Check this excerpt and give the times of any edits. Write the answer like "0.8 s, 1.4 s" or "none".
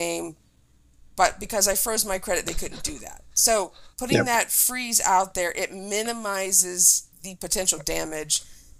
3.9 s, 7.1 s